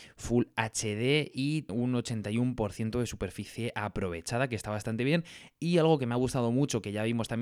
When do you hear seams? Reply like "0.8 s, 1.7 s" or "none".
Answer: 1.7 s

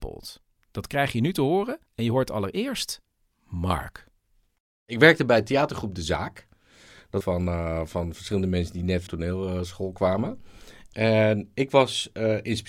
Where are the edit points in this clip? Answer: 1.9 s, 7.2 s, 9.1 s

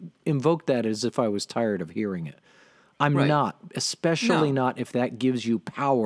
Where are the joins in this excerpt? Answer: none

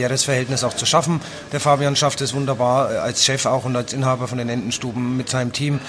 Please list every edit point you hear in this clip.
none

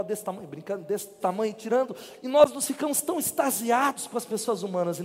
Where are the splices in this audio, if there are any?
1.2 s

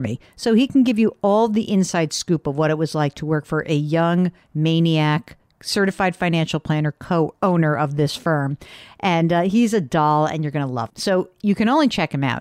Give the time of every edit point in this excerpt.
10.9 s

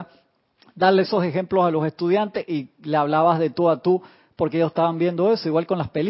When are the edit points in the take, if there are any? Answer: none

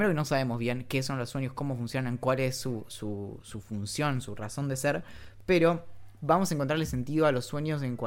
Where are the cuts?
none

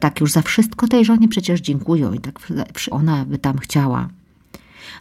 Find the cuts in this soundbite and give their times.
2.9 s

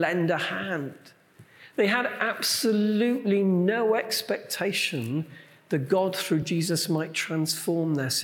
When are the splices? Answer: none

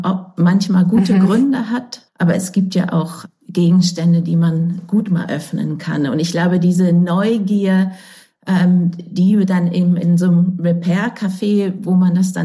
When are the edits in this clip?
none

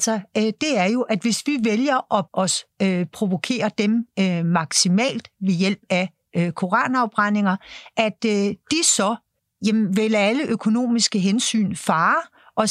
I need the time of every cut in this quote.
2.3 s, 3.1 s, 9.4 s

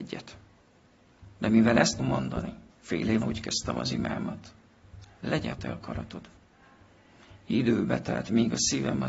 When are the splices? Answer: 2.0 s, 2.7 s, 3.2 s, 5.5 s

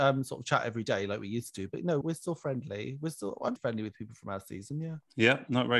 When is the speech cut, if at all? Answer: 2.0 s, 3.6 s

